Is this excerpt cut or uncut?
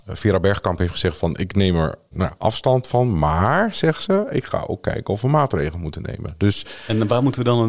cut